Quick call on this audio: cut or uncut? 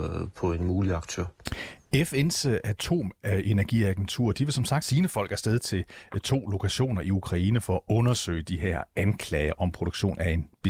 cut